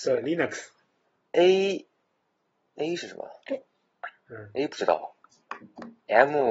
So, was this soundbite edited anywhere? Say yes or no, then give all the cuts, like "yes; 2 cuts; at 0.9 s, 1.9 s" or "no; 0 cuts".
no; 0 cuts